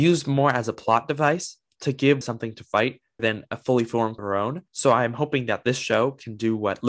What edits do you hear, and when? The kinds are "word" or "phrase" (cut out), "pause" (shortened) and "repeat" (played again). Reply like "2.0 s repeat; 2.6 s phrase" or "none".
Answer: 2.2 s word; 3.2 s word; 4.2 s word; 4.7 s pause